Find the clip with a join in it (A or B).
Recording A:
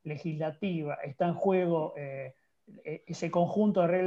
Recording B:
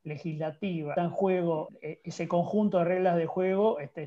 B